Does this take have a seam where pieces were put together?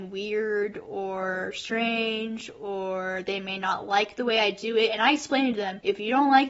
no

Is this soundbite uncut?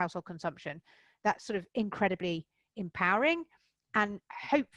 yes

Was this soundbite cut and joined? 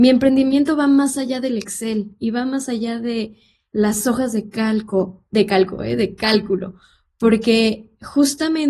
no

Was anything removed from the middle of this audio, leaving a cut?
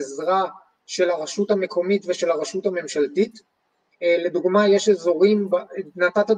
no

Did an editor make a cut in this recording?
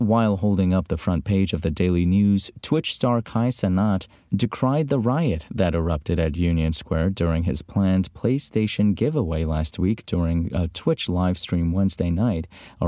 no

